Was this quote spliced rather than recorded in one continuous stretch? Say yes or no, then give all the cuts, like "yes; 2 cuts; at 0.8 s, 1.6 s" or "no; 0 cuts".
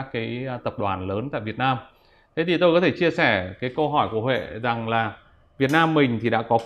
no; 0 cuts